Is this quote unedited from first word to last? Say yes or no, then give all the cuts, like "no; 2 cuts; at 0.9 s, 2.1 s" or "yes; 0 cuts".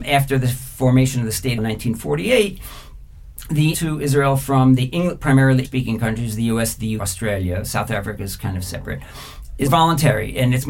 no; 5 cuts; at 1.6 s, 3.7 s, 5.6 s, 7.0 s, 9.7 s